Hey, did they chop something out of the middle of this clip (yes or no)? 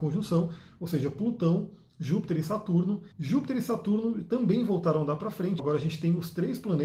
yes